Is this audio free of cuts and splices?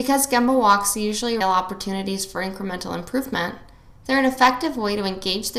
no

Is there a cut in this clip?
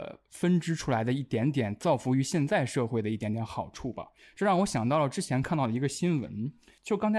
no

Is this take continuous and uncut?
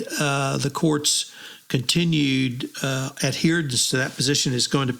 yes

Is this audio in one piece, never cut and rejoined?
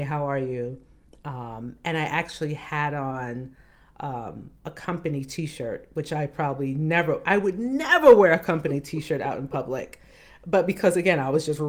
yes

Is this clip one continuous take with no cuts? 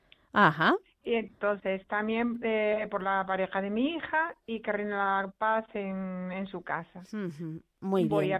yes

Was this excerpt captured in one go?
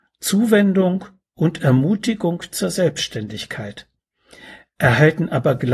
yes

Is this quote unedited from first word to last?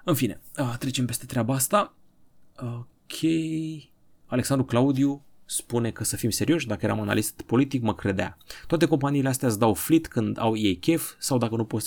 yes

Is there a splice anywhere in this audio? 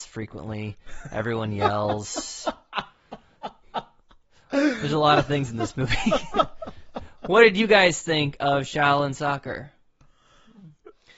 no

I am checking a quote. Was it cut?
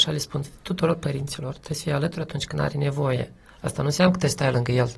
no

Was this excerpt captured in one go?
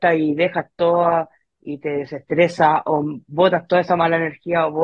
yes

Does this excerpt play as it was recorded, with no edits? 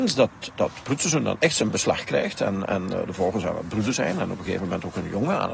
yes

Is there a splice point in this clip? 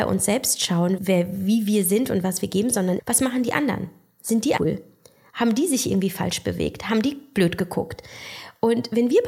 yes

